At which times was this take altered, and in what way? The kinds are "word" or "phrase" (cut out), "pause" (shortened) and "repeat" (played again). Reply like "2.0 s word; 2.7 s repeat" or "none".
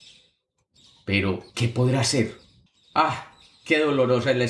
1.5 s pause; 2.7 s pause

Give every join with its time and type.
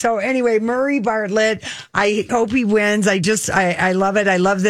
2.3 s word

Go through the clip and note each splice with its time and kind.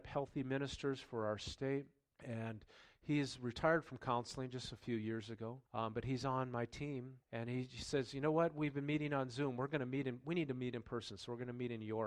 2.1 s pause; 5.7 s pause; 7.2 s pause

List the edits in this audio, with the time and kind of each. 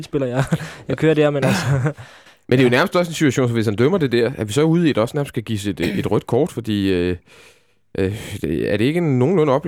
none

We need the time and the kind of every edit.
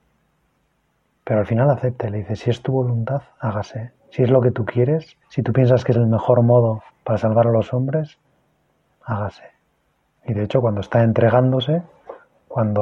4.0 s pause; 5.2 s pause; 6.9 s pause; 9.8 s pause

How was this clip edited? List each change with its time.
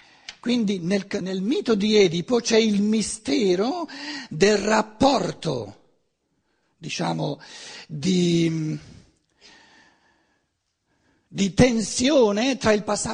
1.2 s word

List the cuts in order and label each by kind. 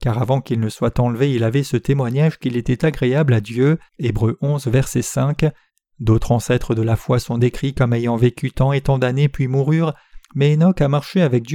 3.9 s pause; 5.7 s pause; 10.2 s pause

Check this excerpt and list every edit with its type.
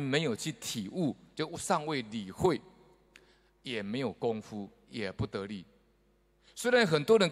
none

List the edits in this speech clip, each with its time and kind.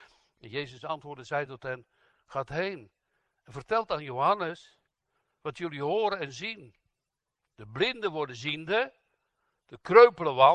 none

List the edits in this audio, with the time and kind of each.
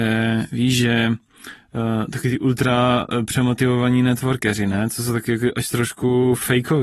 none

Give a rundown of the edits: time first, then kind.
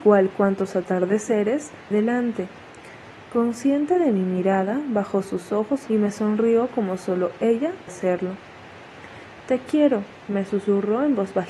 1.9 s word; 5.9 s phrase; 7.9 s word; 10.2 s pause

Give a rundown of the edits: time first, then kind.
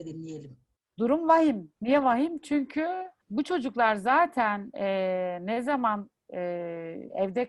1.8 s pause; 3.2 s pause

